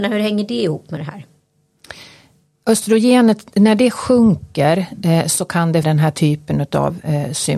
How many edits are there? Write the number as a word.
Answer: one